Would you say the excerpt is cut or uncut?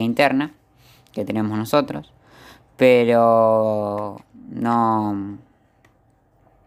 uncut